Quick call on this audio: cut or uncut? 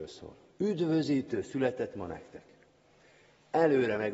uncut